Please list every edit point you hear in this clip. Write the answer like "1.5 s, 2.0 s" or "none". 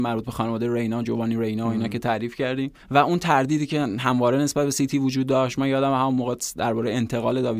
2.8 s